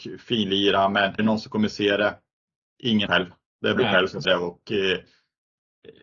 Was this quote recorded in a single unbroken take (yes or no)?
no